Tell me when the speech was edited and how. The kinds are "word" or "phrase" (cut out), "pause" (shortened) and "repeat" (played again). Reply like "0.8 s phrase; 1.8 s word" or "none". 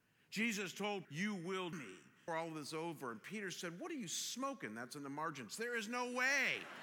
1.0 s word; 1.7 s word; 2.3 s word